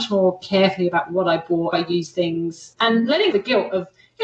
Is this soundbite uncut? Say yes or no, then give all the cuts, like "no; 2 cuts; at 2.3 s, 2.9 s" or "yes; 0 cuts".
no; 2 cuts; at 1.7 s, 3.3 s